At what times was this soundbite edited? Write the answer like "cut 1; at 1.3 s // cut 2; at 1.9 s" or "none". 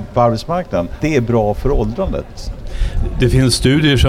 cut 1; at 1.0 s